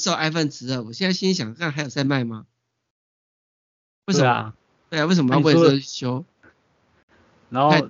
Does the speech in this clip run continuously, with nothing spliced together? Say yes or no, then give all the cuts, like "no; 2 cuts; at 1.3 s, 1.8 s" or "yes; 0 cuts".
yes; 0 cuts